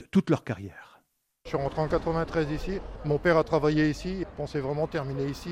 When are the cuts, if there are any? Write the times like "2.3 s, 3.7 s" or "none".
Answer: none